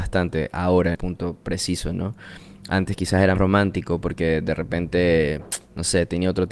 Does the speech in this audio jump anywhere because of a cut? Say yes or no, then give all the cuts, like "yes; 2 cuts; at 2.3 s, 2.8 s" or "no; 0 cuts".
yes; 2 cuts; at 0.9 s, 3.4 s